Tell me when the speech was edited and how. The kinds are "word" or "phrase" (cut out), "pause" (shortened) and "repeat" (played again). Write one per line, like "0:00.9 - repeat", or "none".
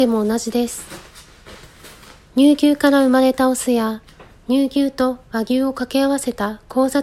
none